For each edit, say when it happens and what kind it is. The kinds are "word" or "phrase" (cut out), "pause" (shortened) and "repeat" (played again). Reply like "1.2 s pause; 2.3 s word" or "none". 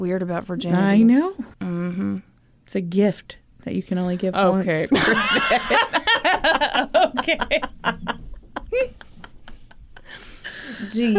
1.5 s pause